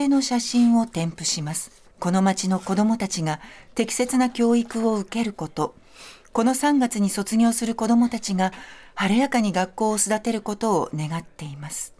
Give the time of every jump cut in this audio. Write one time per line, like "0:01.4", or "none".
0:01.9